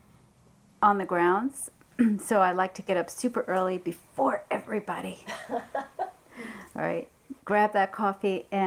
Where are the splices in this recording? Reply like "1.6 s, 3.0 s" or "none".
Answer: 7.4 s